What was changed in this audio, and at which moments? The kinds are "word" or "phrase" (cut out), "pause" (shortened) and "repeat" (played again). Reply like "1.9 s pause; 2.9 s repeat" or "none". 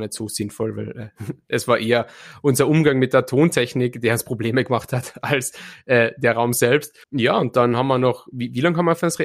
7.0 s pause